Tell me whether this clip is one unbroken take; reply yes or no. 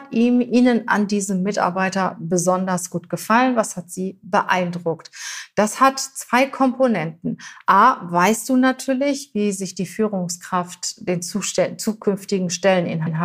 yes